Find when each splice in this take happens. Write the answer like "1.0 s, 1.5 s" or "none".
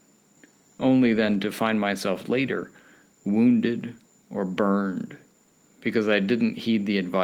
none